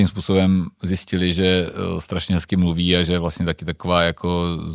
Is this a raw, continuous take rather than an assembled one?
yes; 0 cuts

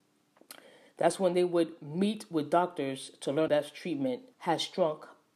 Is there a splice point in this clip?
yes; 2 cuts; at 3.5 s, 4.3 s

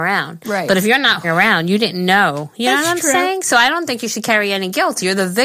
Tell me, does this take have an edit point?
yes; 1 cut; at 1.2 s

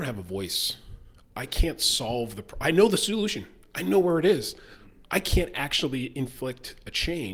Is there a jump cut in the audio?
no; 0 cuts

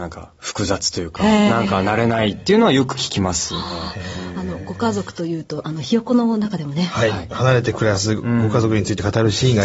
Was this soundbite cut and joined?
no; 0 cuts

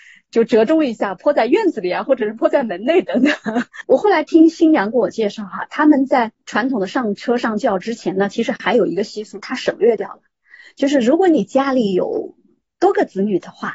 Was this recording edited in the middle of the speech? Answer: no; 0 cuts

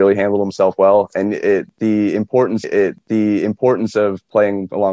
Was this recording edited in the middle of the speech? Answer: yes; 1 cut; at 2.6 s

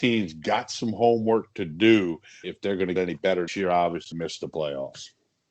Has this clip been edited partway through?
yes; 4 cuts; at 2.4 s, 3.0 s, 3.5 s, 4.1 s

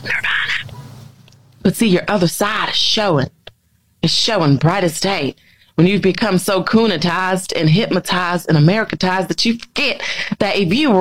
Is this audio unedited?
yes; 0 cuts

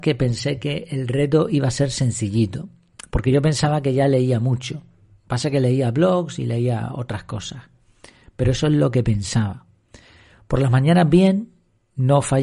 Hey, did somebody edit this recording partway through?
no; 0 cuts

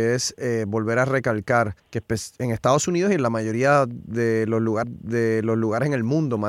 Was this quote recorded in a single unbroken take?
no; 2 cuts; at 1.8 s, 4.8 s

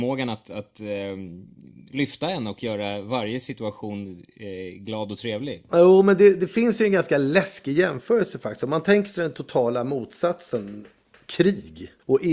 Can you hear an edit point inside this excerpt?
no; 0 cuts

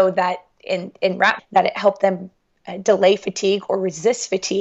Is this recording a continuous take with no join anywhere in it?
no; 1 cut; at 1.4 s

